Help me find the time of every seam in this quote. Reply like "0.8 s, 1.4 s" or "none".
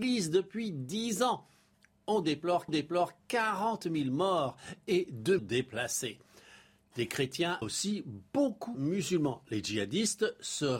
2.7 s, 5.4 s, 7.6 s, 8.7 s

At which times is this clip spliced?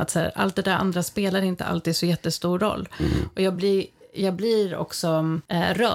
none

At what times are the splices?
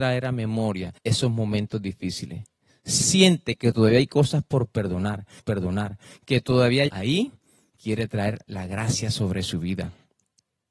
1.0 s, 3.0 s, 5.4 s, 6.9 s, 7.7 s

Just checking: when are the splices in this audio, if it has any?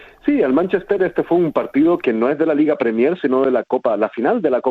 none

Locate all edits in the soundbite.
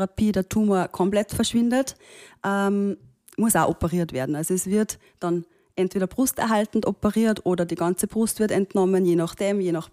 none

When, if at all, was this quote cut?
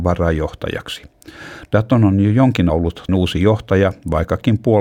2.7 s, 3.1 s

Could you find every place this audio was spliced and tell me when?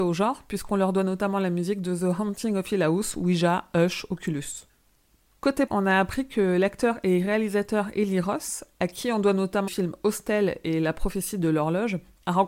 5.7 s, 9.7 s

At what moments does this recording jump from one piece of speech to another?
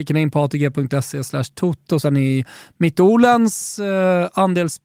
2.0 s

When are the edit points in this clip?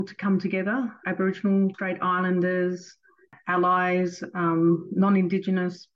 1.0 s, 1.7 s

